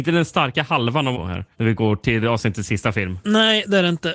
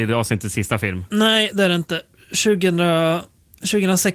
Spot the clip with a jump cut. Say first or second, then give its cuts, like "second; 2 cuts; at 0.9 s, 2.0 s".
first; 2 cuts; at 1.1 s, 1.5 s